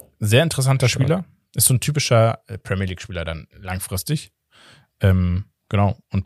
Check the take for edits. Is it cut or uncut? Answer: uncut